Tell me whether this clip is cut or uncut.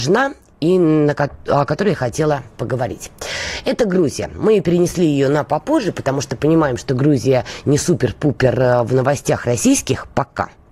uncut